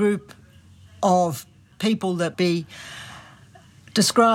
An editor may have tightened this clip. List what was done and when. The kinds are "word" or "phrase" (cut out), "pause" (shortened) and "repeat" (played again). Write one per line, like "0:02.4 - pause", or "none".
0:02.3 - word